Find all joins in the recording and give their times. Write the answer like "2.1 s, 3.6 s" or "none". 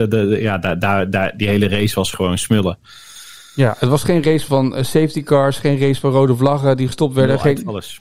4.5 s